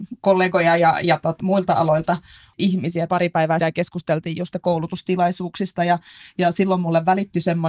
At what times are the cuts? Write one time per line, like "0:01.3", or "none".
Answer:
0:01.4
0:02.5
0:03.1
0:03.6
0:04.5